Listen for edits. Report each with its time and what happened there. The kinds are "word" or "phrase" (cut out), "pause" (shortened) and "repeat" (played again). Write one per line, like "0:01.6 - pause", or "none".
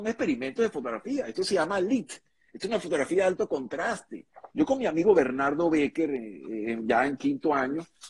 0:04.5 - pause